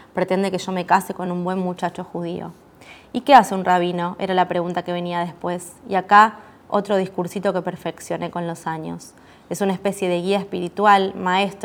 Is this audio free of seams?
yes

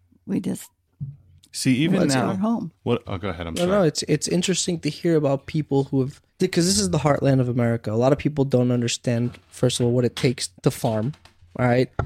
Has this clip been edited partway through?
yes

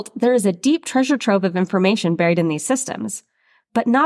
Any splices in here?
no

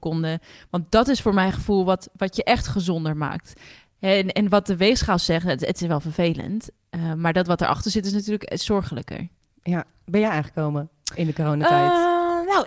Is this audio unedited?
yes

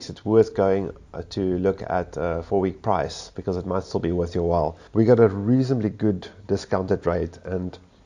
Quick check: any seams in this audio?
yes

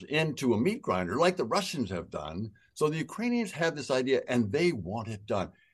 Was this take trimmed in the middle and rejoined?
no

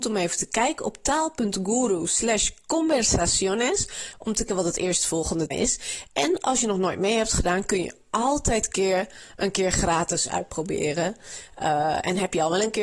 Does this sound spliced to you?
yes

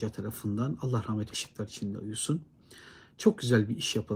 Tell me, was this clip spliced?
yes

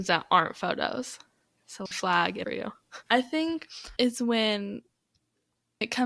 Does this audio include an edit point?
yes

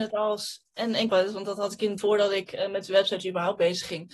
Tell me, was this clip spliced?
yes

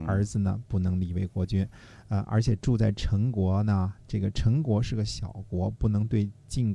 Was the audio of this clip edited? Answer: no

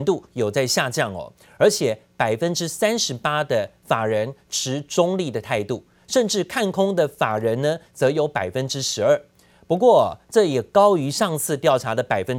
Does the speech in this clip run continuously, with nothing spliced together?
yes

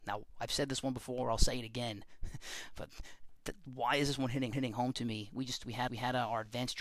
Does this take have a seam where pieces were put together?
yes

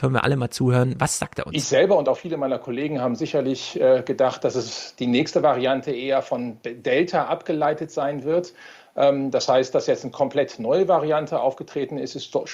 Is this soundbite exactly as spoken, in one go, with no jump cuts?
yes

